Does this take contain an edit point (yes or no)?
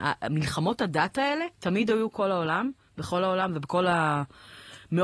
yes